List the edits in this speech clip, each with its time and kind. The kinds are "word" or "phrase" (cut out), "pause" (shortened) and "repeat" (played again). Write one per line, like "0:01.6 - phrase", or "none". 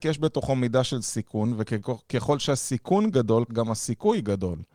0:03.5 - word